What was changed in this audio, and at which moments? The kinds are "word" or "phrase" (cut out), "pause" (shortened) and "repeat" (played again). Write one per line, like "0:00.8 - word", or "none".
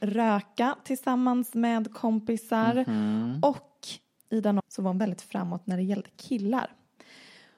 0:04.6 - word